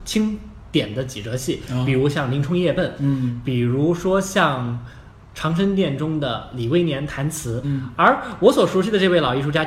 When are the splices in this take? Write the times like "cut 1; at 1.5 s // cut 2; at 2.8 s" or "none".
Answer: cut 1; at 7.6 s